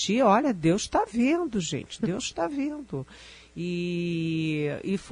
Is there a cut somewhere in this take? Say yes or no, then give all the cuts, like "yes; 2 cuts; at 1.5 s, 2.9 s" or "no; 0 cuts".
no; 0 cuts